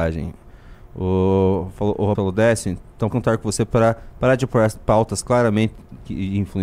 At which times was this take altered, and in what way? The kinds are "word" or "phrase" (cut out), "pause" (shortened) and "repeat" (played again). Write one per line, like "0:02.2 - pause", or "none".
0:02.1 - word
0:03.1 - word